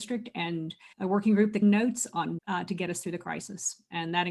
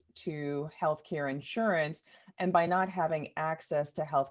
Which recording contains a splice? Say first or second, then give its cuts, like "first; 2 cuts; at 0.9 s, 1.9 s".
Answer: first; 3 cuts; at 0.9 s, 1.6 s, 2.4 s